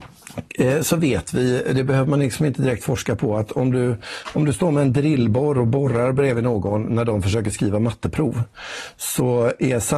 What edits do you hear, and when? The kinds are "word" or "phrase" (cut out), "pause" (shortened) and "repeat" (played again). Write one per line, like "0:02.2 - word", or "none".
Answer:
none